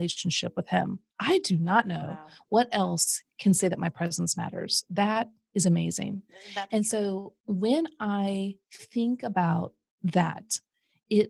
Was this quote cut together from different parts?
yes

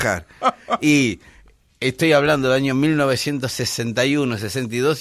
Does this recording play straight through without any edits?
yes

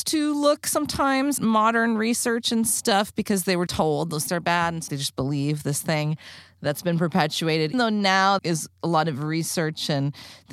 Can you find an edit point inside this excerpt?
yes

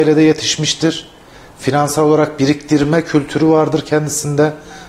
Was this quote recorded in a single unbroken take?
yes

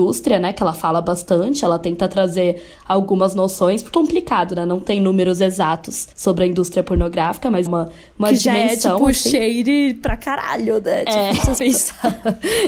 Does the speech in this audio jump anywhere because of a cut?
yes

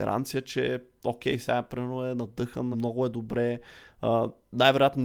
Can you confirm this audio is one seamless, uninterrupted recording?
no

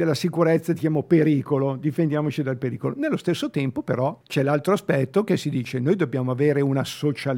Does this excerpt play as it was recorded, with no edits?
no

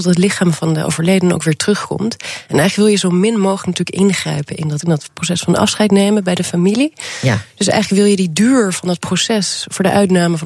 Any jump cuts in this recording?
yes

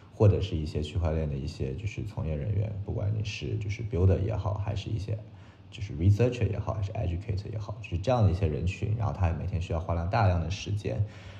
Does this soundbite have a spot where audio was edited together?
no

